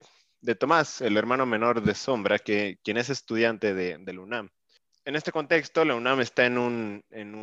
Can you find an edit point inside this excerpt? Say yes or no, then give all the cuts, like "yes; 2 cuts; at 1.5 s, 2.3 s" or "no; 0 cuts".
no; 0 cuts